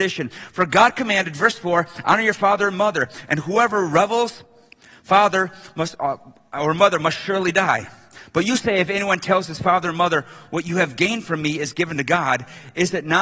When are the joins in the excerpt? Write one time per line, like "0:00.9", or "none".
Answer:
none